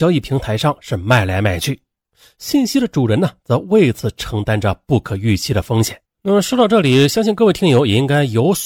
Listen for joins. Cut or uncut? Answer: cut